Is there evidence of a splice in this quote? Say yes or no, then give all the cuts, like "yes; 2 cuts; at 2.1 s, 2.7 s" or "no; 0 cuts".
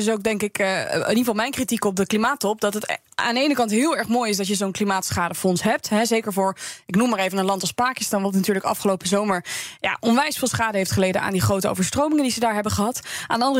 no; 0 cuts